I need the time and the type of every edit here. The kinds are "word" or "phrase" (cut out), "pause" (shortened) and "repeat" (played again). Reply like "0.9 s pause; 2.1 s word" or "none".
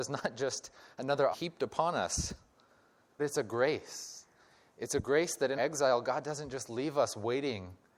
1.3 s word; 3.2 s word; 5.6 s word